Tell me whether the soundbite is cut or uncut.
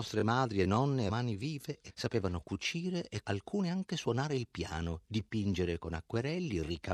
cut